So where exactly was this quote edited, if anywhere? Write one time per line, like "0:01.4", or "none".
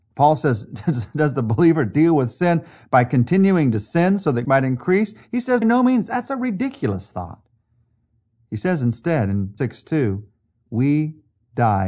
0:04.4
0:05.6
0:09.6